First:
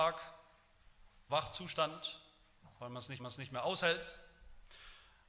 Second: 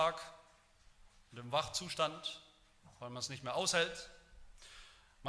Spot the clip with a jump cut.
first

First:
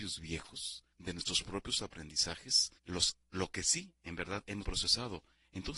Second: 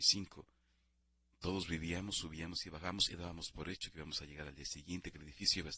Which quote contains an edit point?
first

